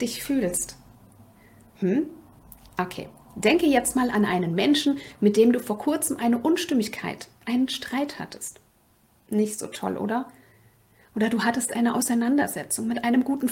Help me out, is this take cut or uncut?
uncut